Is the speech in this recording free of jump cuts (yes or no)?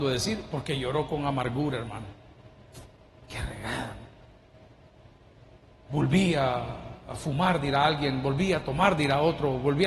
yes